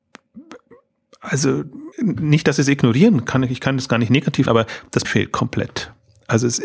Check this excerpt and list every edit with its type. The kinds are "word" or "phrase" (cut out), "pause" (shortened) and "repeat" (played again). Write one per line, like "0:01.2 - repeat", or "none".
0:01.9 - pause
0:04.5 - word
0:05.0 - word